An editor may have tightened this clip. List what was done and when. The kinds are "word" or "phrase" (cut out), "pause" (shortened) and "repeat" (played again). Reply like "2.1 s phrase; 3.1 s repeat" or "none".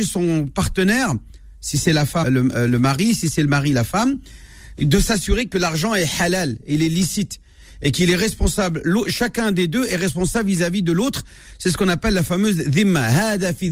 2.2 s word